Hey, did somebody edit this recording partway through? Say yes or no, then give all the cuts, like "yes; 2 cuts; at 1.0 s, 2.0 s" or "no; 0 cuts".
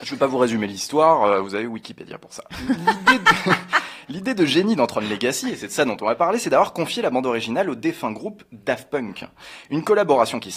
no; 0 cuts